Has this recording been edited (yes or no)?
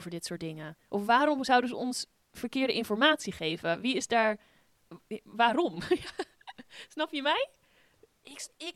no